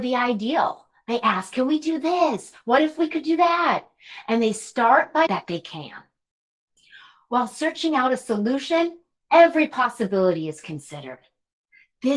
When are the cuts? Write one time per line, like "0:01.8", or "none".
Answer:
0:05.3